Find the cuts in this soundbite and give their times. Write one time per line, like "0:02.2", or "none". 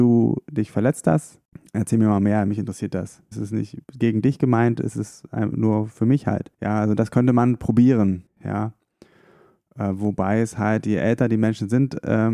0:03.8
0:06.5
0:08.3

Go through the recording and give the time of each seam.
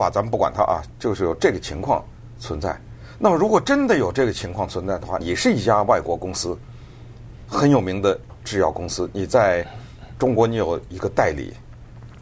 0:05.2

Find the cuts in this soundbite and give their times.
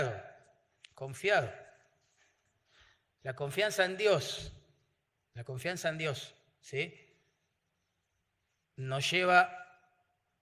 none

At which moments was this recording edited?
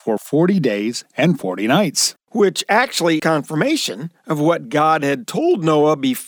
0:03.2

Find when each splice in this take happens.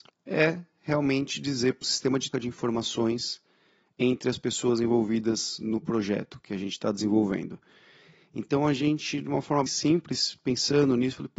0:01.8
0:02.3
0:09.7

